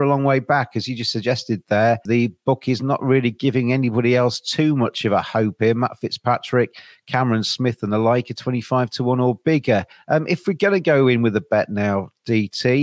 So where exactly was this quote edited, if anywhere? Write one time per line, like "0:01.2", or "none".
none